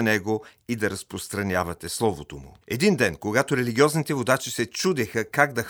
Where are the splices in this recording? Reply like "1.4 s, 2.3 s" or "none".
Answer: 2.6 s